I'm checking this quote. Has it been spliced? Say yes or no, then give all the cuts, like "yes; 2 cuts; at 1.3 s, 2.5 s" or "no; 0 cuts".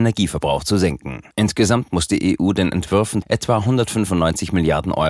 yes; 2 cuts; at 1.3 s, 3.2 s